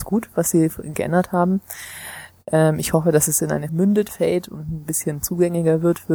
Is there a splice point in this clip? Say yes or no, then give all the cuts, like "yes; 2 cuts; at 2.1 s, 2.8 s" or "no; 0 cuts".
yes; 3 cuts; at 0.9 s, 3.7 s, 4.1 s